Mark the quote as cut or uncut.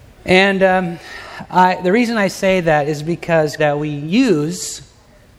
cut